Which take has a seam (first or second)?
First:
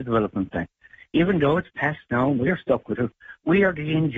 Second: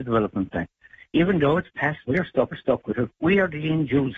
second